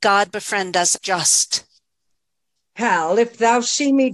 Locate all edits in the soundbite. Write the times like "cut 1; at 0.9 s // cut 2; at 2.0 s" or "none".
cut 1; at 1.0 s